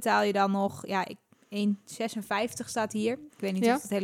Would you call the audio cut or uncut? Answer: uncut